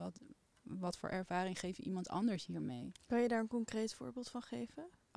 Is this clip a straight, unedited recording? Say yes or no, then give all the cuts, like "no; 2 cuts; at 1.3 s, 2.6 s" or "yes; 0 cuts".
yes; 0 cuts